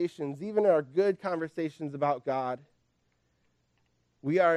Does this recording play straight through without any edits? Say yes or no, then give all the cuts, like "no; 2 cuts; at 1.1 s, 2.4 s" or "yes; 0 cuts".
yes; 0 cuts